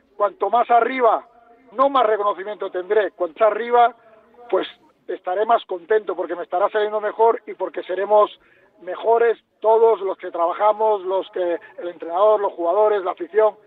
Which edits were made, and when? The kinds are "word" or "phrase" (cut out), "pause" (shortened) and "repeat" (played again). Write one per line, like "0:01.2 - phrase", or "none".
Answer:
0:01.7 - word
0:03.4 - word